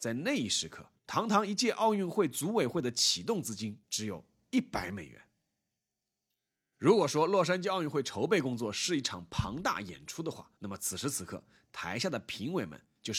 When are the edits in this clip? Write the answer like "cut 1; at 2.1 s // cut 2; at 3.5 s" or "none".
cut 1; at 1.0 s // cut 2; at 3.8 s // cut 3; at 10.6 s

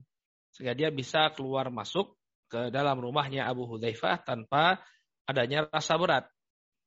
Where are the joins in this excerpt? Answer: none

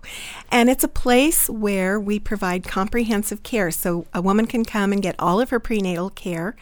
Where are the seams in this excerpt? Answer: none

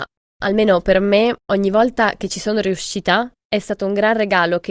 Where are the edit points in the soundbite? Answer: cut 1; at 1.4 s // cut 2; at 3.4 s

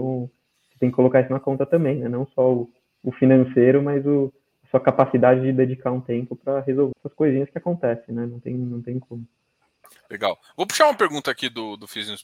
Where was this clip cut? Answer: cut 1; at 6.9 s

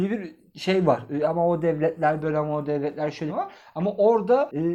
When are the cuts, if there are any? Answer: cut 1; at 3.3 s

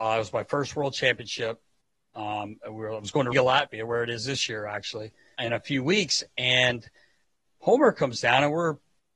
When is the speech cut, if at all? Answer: cut 1; at 3.3 s // cut 2; at 5.3 s

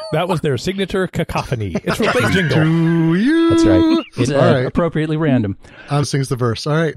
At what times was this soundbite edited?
cut 1; at 2.3 s // cut 2; at 4.2 s // cut 3; at 6.0 s

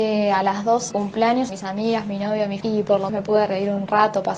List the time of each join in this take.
cut 1; at 0.9 s // cut 2; at 1.5 s // cut 3; at 2.6 s // cut 4; at 3.1 s

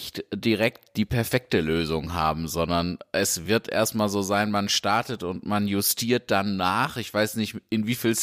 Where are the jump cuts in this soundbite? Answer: none

